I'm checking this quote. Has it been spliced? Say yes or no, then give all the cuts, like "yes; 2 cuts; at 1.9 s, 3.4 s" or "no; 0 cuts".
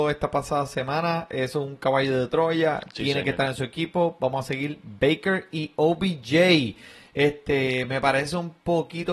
no; 0 cuts